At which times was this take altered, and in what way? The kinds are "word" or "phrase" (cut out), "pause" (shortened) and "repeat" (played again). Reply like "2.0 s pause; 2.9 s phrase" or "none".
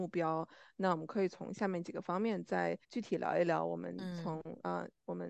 2.8 s pause